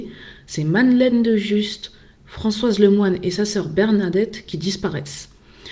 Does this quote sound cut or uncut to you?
uncut